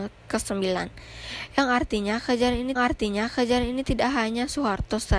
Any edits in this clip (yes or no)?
yes